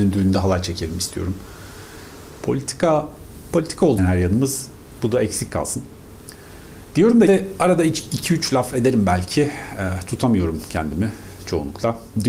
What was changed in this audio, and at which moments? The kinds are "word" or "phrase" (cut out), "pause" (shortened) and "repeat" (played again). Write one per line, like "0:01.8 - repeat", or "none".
0:04.0 - word
0:07.3 - word